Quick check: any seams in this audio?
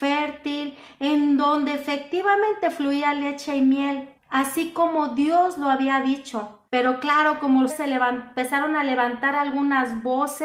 yes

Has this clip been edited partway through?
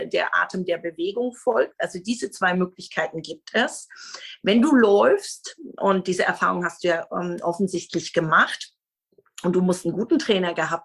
no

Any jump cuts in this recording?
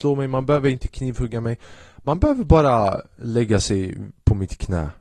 no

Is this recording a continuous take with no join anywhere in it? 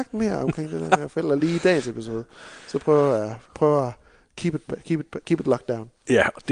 yes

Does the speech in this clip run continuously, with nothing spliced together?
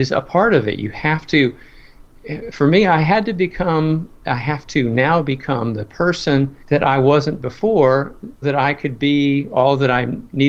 no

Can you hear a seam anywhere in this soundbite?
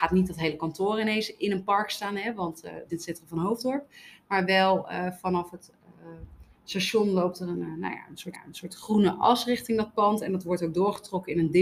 yes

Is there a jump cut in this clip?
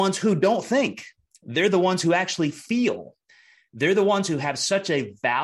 no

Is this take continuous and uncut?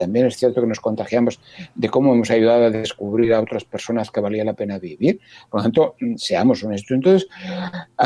yes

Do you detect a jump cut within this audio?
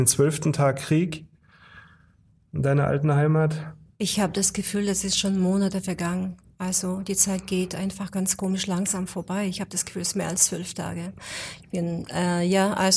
no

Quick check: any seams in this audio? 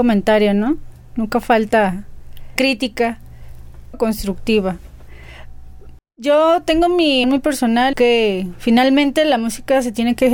yes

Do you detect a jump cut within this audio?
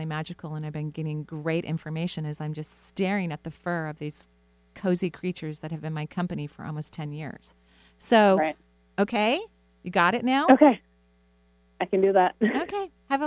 no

